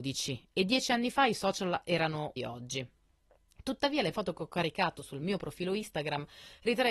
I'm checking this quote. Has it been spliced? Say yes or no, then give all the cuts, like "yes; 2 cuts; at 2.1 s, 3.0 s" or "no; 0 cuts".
yes; 2 cuts; at 2.4 s, 4.1 s